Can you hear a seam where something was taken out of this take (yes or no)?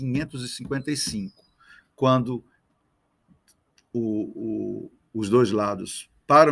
no